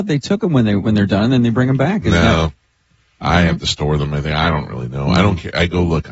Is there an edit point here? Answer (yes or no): no